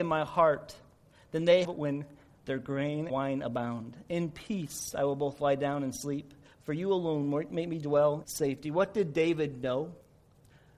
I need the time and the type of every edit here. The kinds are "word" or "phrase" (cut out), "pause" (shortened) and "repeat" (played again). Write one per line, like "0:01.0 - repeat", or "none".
0:01.6 - word
0:03.1 - word
0:07.5 - word
0:08.2 - word